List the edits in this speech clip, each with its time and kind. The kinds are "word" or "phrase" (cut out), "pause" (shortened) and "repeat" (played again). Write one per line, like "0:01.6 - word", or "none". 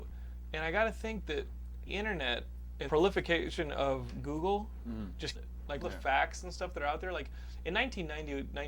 0:01.9 - word
0:02.9 - word
0:05.3 - word
0:05.8 - word